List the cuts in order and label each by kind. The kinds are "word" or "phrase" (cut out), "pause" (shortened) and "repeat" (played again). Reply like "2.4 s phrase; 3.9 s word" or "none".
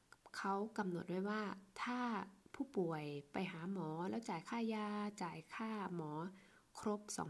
2.4 s pause